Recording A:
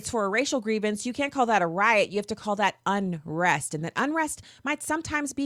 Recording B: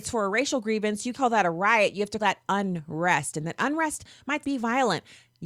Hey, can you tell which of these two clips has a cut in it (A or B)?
B